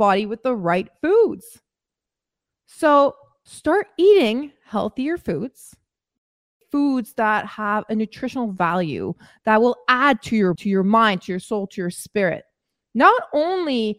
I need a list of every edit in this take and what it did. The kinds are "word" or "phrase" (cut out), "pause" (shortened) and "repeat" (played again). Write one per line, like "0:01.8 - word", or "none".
0:10.6 - word